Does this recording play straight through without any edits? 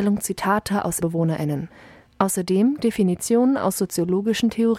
no; 2 cuts; at 1.0 s, 2.8 s

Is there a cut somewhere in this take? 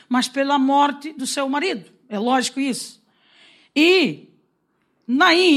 no; 0 cuts

